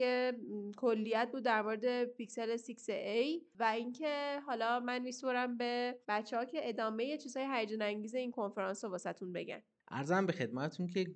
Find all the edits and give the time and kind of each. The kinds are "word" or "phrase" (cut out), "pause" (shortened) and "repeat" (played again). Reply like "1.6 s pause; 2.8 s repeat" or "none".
6.0 s pause